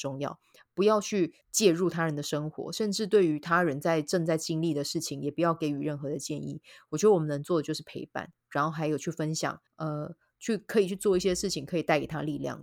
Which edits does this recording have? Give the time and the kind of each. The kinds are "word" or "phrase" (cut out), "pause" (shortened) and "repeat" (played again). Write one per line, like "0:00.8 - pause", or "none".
0:01.4 - pause
0:09.7 - pause